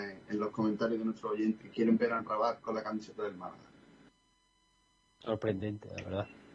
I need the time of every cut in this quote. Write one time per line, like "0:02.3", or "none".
0:01.6
0:02.6